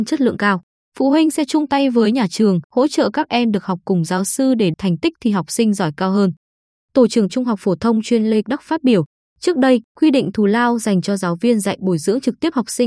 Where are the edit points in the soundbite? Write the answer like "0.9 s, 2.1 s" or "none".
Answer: 2.7 s, 4.7 s, 7.3 s, 8.4 s, 9.9 s